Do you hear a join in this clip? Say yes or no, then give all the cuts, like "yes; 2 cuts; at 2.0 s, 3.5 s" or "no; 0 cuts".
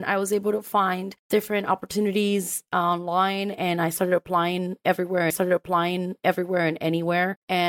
yes; 1 cut; at 5.3 s